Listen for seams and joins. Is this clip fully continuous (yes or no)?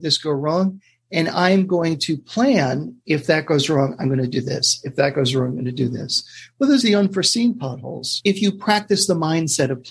no